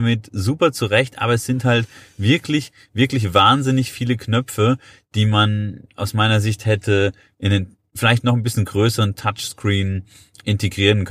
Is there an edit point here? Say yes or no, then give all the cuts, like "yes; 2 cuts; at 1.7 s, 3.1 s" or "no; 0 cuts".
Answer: no; 0 cuts